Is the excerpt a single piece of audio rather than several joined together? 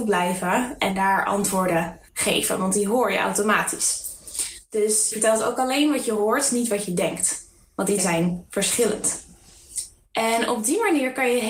no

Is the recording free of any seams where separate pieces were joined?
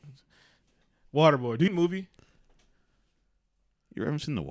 no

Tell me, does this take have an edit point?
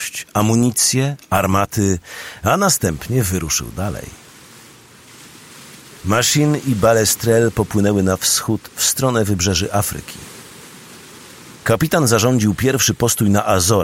yes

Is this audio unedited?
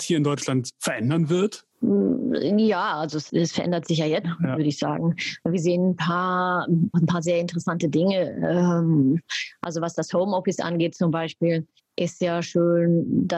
no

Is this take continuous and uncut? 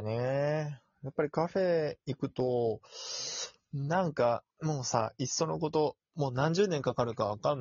no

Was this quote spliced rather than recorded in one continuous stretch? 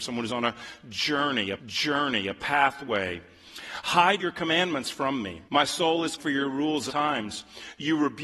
yes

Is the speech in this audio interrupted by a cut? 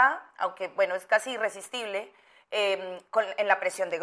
no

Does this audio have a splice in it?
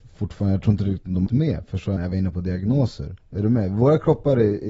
yes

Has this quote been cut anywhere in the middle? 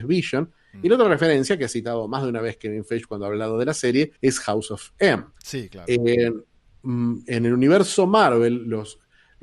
yes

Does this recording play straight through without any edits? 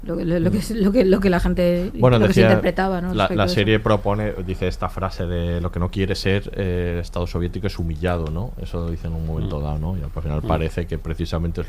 yes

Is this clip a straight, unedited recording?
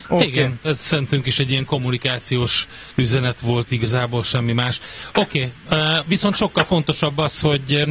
no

